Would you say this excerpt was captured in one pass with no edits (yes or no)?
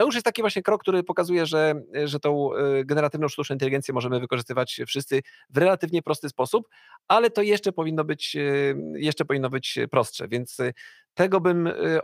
yes